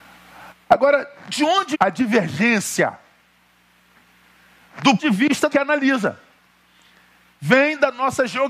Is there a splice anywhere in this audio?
yes; 3 cuts; at 1.7 s, 5.0 s, 5.5 s

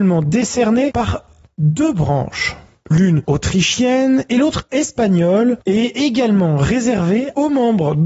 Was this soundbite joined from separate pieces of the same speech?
no; 0 cuts

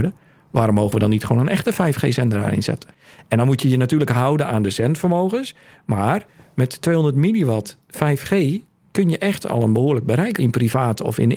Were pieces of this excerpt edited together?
yes; 1 cut; at 10.4 s

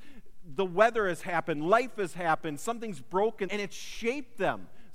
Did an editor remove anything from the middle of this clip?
yes; 1 cut; at 3.5 s

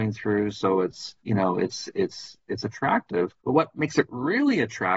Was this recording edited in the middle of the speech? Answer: yes; 2 cuts; at 1.2 s, 3.4 s

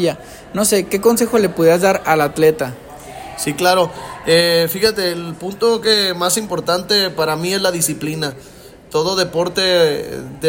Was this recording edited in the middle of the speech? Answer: yes; 1 cut; at 5.8 s

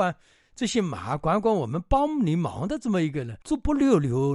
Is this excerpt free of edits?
no; 1 cut; at 3.4 s

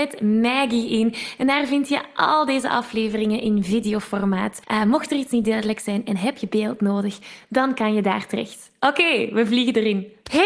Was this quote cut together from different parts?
no; 0 cuts

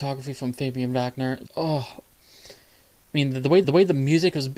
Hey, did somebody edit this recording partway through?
yes; 2 cuts; at 1.5 s, 3.6 s

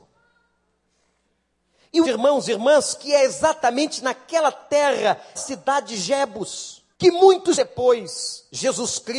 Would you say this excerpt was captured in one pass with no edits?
no; 4 cuts; at 2.0 s, 5.4 s, 6.9 s, 7.5 s

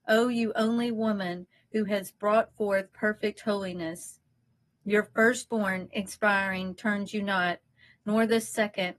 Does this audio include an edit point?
no; 0 cuts

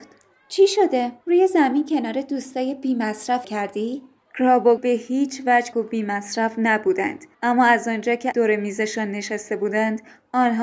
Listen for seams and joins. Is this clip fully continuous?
no; 6 cuts; at 1.2 s, 3.4 s, 4.8 s, 5.7 s, 7.3 s, 8.3 s

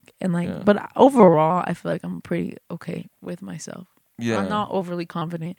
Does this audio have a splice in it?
no; 0 cuts

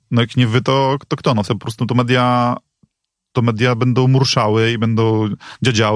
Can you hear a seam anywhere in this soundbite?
yes; 1 cut; at 1.5 s

